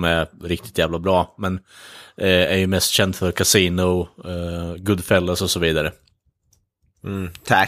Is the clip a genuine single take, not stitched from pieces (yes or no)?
yes